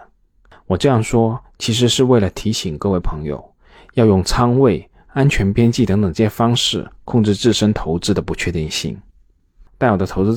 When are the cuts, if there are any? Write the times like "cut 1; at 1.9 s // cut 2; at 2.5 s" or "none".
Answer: none

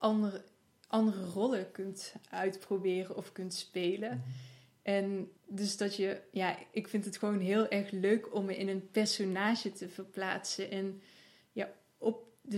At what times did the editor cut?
cut 1; at 5.4 s

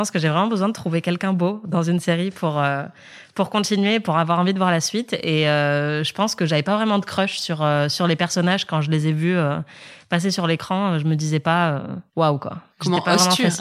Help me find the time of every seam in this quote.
cut 1; at 12.1 s

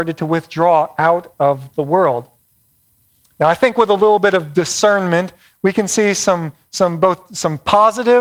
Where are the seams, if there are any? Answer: none

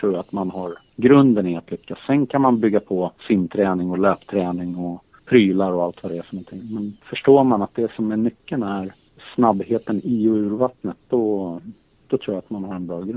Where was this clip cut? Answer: cut 1; at 3.2 s // cut 2; at 7.0 s

